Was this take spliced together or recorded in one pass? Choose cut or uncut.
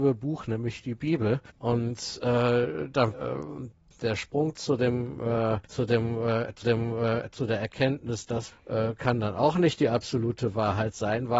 cut